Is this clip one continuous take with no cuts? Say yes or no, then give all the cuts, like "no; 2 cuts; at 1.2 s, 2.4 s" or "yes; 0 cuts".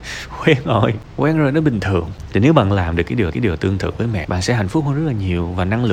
no; 2 cuts; at 3.3 s, 4.2 s